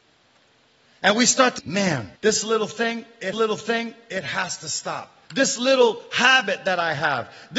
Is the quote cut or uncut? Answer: cut